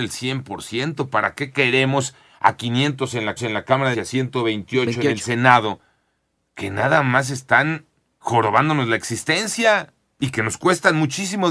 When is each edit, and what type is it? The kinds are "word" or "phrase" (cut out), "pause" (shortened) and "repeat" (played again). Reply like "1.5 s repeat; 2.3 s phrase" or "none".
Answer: 3.4 s repeat; 3.9 s word